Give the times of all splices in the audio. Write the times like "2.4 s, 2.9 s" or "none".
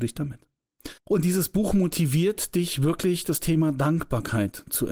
1.0 s